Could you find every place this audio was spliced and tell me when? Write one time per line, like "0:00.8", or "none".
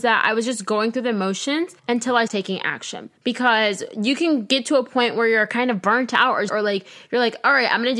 0:01.8
0:02.3
0:03.2
0:06.5